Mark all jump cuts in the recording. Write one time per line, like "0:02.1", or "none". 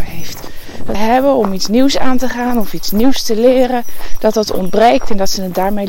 0:00.9